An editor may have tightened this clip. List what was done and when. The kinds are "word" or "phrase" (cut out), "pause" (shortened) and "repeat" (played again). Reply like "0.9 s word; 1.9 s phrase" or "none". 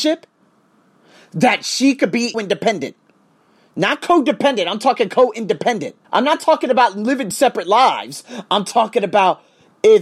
2.3 s word; 6.0 s pause; 7.3 s word